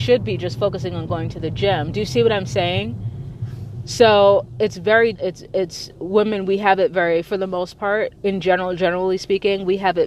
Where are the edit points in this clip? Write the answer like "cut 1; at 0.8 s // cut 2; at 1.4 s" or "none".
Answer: cut 1; at 5.1 s // cut 2; at 8.2 s